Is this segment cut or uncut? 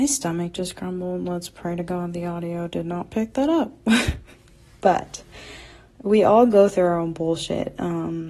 uncut